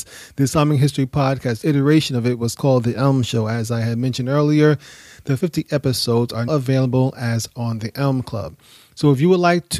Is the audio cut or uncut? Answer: cut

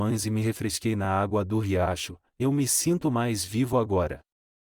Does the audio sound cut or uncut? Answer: uncut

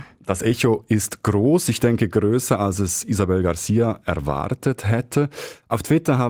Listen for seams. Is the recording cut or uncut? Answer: uncut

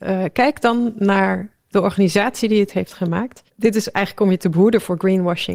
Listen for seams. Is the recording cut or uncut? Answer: cut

